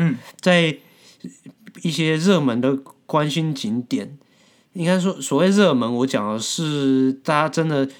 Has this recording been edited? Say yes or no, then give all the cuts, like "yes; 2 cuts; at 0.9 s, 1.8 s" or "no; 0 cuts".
no; 0 cuts